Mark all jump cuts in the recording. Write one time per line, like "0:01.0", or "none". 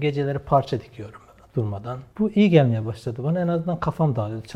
none